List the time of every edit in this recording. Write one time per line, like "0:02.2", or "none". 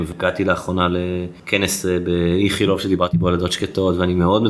none